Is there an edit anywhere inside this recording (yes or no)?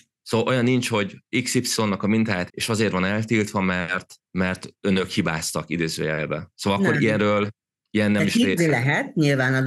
yes